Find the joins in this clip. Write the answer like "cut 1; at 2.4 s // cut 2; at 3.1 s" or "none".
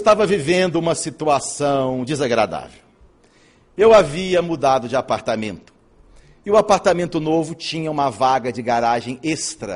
none